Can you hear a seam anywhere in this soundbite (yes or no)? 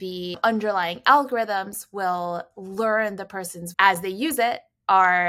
yes